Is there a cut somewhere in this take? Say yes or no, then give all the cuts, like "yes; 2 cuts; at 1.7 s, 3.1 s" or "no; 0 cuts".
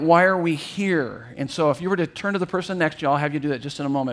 no; 0 cuts